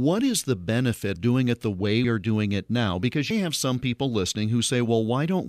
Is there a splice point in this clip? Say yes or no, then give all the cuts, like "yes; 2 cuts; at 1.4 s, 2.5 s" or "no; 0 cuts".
yes; 3 cuts; at 1.2 s, 2.0 s, 3.3 s